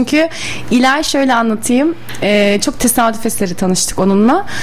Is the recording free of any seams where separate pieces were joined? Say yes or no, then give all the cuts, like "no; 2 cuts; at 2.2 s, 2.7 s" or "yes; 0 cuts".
yes; 0 cuts